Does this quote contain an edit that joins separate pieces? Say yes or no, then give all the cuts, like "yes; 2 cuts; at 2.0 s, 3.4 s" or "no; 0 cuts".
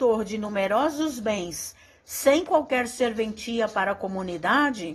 no; 0 cuts